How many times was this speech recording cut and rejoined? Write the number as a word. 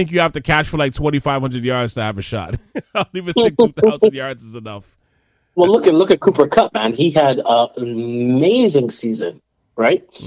zero